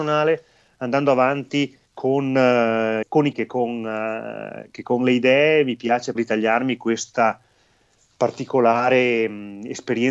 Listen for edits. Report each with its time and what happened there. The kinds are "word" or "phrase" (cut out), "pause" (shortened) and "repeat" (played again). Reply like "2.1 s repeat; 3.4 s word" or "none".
1.9 s pause; 3.0 s phrase; 3.3 s word; 6.2 s word